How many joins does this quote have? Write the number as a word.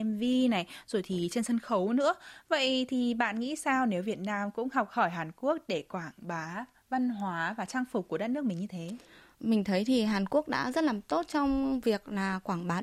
zero